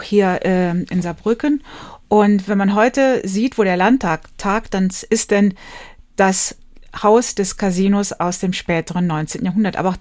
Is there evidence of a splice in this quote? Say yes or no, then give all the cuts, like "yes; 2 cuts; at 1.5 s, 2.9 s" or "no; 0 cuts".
no; 0 cuts